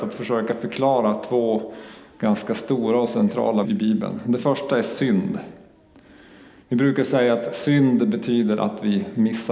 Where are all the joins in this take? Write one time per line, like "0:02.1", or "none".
0:03.6